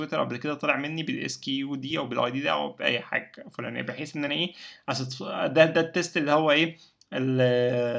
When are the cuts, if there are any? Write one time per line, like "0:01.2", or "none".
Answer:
none